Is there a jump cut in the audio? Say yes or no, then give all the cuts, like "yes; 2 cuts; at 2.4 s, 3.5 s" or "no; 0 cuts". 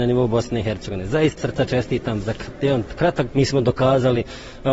yes; 2 cuts; at 1.4 s, 3.3 s